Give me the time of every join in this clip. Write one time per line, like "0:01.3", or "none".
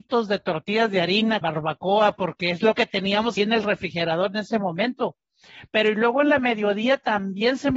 0:01.4
0:03.4